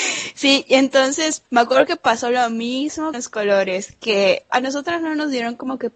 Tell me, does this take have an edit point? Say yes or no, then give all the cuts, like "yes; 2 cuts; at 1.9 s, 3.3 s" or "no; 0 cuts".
yes; 3 cuts; at 1.5 s, 3.1 s, 4.5 s